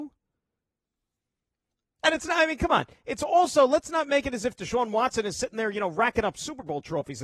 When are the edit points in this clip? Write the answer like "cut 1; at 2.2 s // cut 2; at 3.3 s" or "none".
none